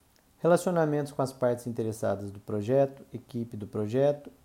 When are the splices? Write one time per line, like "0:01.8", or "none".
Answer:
none